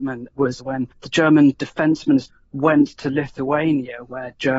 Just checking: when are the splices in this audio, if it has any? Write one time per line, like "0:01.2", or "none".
0:00.9